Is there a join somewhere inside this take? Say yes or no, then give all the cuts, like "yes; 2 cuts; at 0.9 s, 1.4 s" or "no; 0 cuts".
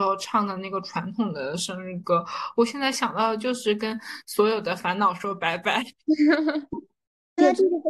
no; 0 cuts